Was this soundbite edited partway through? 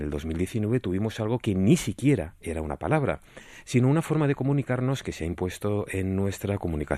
no; 0 cuts

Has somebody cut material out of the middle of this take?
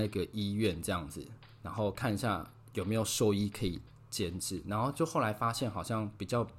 no; 0 cuts

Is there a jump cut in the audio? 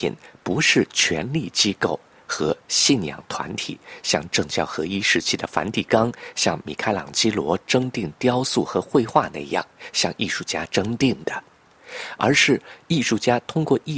no; 0 cuts

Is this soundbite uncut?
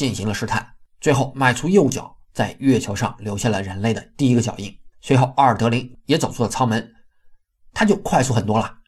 no; 1 cut; at 4.9 s

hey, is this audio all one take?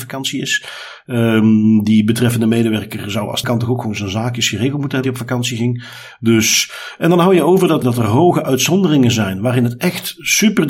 no; 3 cuts; at 3.4 s, 5.0 s, 7.8 s

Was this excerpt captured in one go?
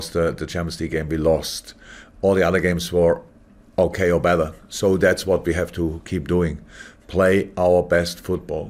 yes; 0 cuts

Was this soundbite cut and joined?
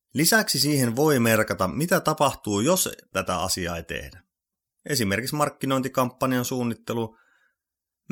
no; 0 cuts

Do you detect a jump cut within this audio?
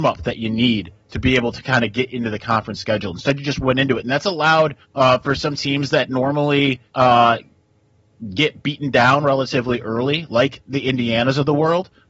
yes; 2 cuts; at 4.8 s, 6.9 s

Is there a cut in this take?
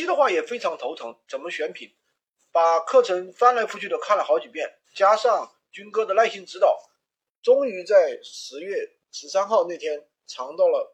yes; 1 cut; at 4.8 s

